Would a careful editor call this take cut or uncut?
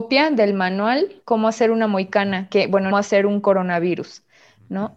cut